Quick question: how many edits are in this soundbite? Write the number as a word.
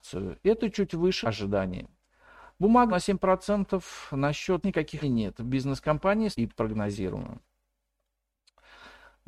five